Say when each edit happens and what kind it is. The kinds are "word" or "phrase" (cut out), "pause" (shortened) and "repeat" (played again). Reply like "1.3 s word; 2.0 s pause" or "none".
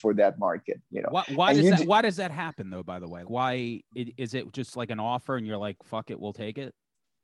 3.2 s word; 3.9 s word